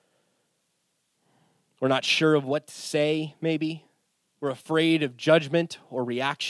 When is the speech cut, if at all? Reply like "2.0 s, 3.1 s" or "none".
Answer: none

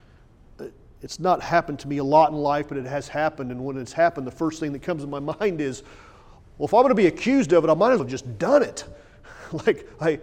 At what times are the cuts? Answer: 8.0 s

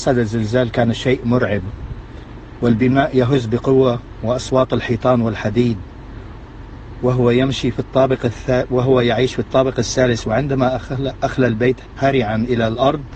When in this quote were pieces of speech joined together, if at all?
none

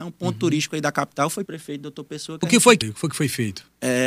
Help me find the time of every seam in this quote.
1.5 s, 2.8 s

